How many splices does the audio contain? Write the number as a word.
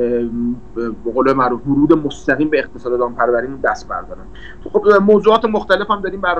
one